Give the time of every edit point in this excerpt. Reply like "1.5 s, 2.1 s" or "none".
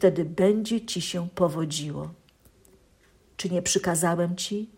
none